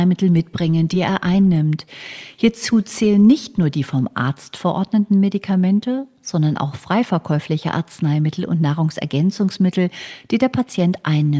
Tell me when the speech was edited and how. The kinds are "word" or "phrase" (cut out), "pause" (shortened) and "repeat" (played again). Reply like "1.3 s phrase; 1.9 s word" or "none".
none